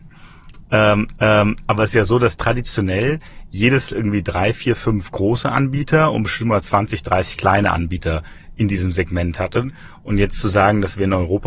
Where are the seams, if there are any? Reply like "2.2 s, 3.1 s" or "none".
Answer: 1.1 s, 3.9 s

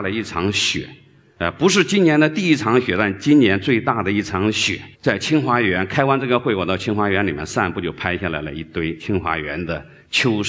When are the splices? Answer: 4.9 s

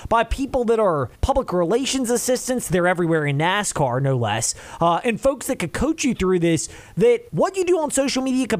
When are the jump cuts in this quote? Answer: 1.1 s, 7.3 s

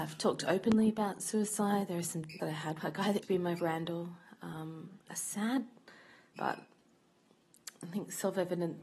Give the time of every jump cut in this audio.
2.4 s, 2.8 s, 3.2 s, 3.6 s, 5.1 s, 6.4 s

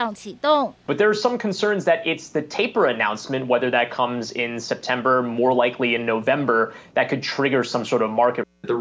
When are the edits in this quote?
none

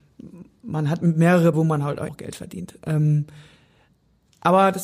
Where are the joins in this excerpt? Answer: 1.5 s, 2.1 s

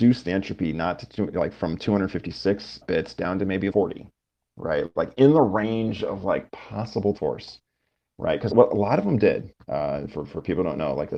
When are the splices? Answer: 2.8 s, 3.7 s, 7.2 s, 8.5 s

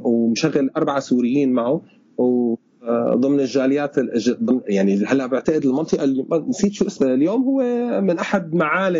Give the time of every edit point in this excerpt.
7.0 s

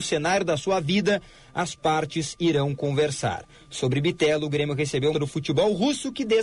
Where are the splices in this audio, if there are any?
5.1 s

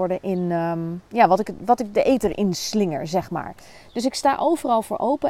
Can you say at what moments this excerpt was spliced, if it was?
1.1 s

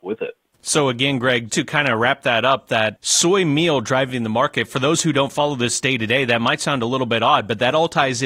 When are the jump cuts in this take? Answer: 1.5 s

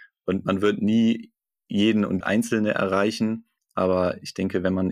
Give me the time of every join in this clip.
2.2 s

